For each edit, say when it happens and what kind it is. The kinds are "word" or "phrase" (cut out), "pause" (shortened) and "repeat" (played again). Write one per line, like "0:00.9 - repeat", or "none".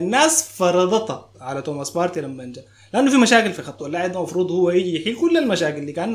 0:01.3 - word
0:03.8 - word